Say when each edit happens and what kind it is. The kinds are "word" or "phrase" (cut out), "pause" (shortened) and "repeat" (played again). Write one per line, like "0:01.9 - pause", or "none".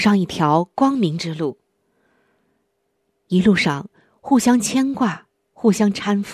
none